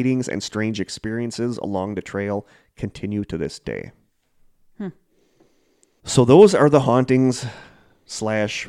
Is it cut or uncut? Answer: uncut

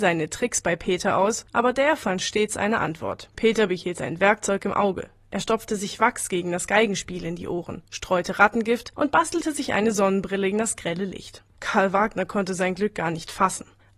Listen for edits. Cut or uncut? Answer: cut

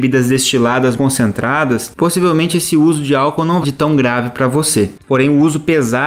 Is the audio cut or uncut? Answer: cut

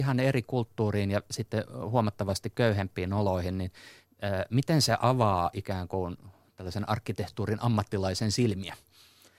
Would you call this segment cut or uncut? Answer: uncut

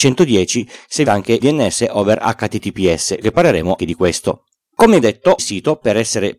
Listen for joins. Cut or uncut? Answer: cut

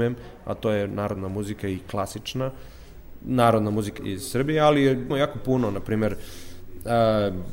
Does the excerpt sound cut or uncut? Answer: cut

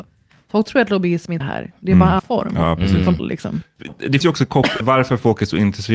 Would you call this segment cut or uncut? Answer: cut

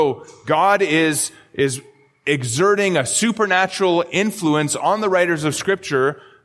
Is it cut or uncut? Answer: uncut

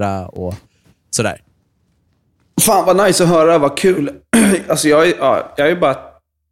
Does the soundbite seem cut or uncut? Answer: uncut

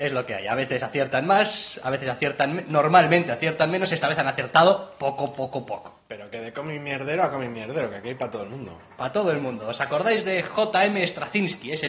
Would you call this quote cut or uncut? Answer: uncut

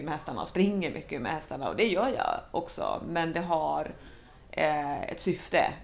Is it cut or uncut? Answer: uncut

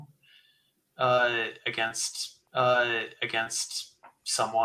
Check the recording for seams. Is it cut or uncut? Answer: cut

